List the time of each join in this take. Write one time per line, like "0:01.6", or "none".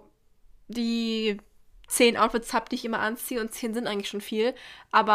none

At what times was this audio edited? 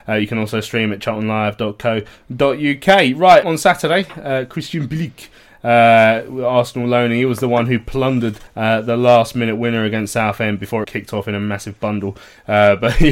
0:03.4
0:08.5
0:10.8

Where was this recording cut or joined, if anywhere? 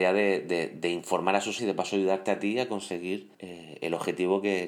0:01.6
0:03.3

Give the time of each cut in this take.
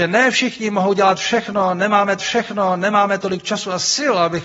0:02.2

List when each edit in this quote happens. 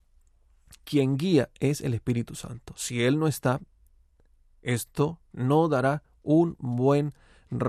0:05.2

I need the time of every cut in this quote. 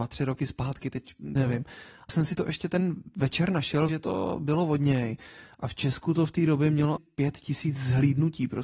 0:01.4
0:02.1
0:03.9
0:07.0

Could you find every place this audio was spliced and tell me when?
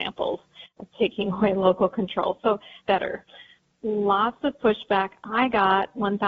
0:02.8

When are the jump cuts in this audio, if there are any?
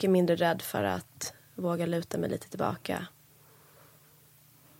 none

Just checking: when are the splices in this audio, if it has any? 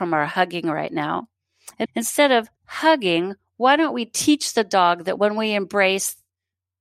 0:01.8
0:02.6

